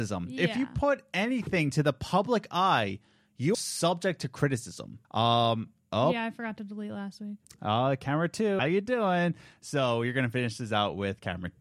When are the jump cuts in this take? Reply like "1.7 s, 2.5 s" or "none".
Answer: 3.5 s, 5.0 s, 8.6 s